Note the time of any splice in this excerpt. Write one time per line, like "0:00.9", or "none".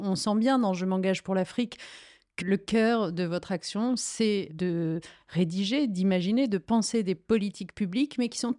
0:02.4
0:04.5